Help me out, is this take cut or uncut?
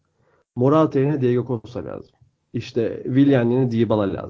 uncut